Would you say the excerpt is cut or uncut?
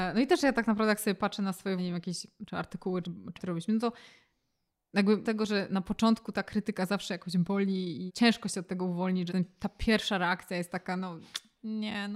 cut